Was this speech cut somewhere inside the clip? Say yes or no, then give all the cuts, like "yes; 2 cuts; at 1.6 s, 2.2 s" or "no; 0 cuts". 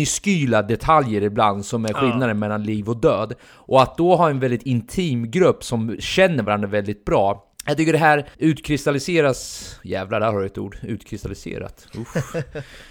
yes; 2 cuts; at 7.5 s, 8.3 s